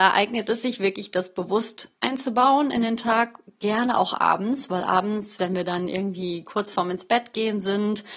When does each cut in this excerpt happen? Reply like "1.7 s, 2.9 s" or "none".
2.0 s